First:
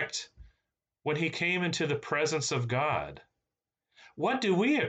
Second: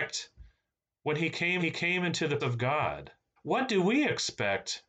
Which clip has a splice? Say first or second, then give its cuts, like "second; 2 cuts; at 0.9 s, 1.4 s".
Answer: second; 3 cuts; at 1.6 s, 2.4 s, 3.4 s